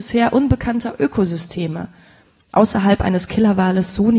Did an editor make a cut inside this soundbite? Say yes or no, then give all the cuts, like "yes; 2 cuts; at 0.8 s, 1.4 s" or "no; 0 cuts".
no; 0 cuts